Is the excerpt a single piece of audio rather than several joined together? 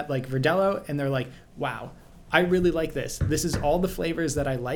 yes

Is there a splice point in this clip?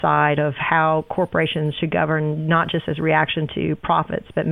no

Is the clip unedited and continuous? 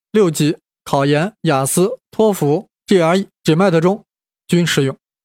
yes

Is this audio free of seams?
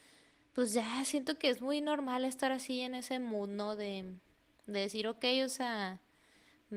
yes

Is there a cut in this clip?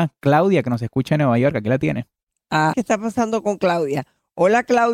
yes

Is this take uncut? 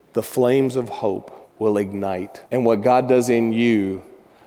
no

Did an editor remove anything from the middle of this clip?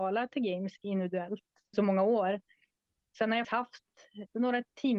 yes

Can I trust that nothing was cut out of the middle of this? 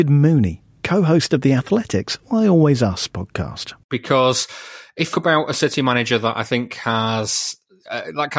no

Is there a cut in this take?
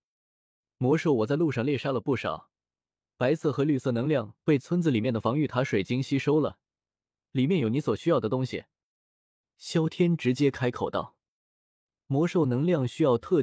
no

